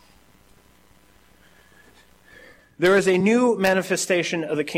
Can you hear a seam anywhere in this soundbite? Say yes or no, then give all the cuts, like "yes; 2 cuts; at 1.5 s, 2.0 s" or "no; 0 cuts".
no; 0 cuts